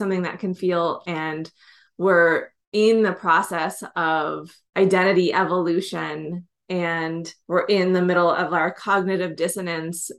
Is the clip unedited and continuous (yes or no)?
no